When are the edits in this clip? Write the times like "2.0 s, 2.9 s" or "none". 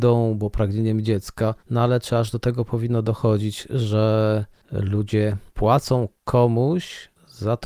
1.6 s, 5.5 s